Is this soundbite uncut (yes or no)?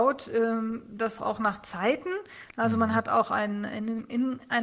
no